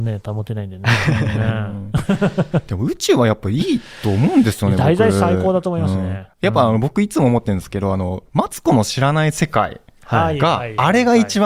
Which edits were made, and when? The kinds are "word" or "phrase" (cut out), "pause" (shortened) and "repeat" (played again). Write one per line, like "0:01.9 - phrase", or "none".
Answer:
0:06.3 - pause